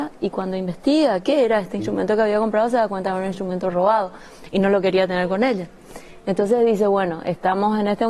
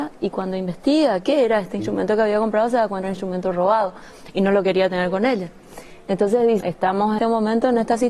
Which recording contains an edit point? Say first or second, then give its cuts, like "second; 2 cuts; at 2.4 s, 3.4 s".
second; 3 cuts; at 3.0 s, 6.6 s, 7.2 s